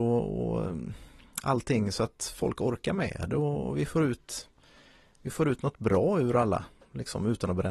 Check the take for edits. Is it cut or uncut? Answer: uncut